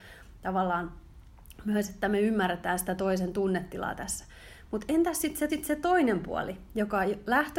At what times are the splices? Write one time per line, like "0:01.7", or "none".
0:05.5

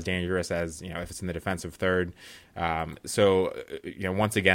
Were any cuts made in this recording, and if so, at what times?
none

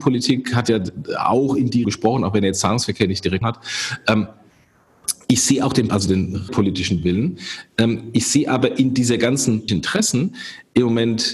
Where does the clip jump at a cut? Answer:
0:01.8
0:03.4
0:05.9
0:06.5
0:09.7

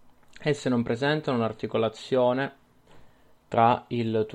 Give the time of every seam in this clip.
none

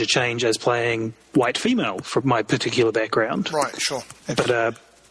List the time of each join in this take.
0:01.3
0:02.2
0:04.2

